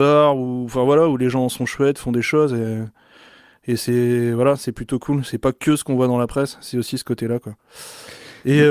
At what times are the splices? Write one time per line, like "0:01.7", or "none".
none